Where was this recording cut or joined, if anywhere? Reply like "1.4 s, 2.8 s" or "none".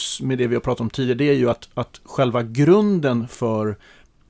none

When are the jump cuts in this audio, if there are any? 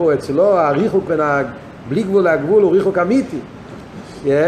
1.1 s

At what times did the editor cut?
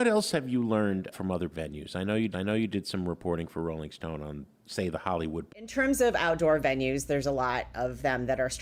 1.1 s, 1.5 s, 2.3 s, 5.5 s

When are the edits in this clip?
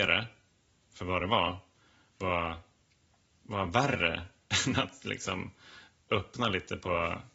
none

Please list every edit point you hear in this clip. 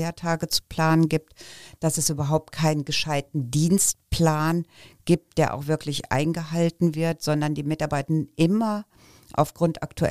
none

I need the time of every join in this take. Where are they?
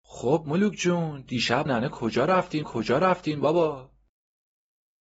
1.7 s, 2.6 s

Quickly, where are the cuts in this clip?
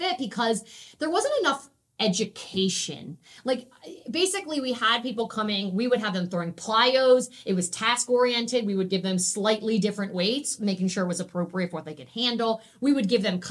none

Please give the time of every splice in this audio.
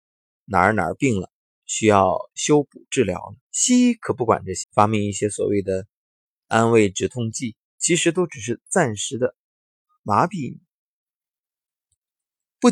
3.4 s, 4.6 s, 7.7 s

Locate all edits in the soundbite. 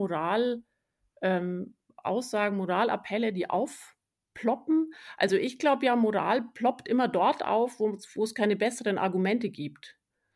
none

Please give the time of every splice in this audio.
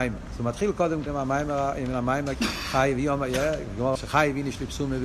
1.1 s, 2.3 s, 4.0 s

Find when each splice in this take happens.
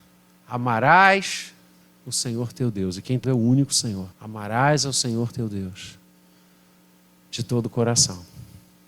1.8 s, 3.2 s, 4.1 s

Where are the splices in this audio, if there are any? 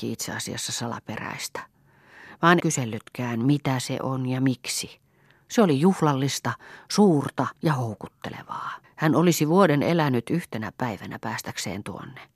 2.6 s, 7.5 s, 8.8 s

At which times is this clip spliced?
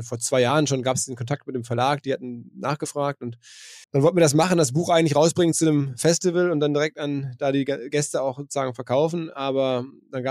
3.8 s

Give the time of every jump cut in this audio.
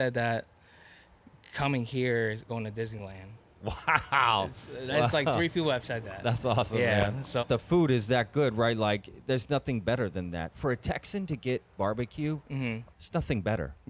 2.5 s, 7.4 s, 11.8 s, 12.9 s

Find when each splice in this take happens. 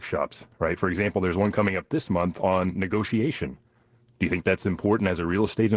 none

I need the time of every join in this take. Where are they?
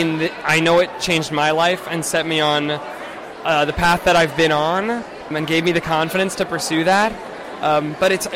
5.3 s

